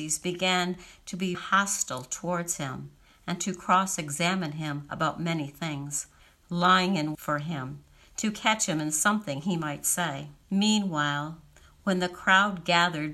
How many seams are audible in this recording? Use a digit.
3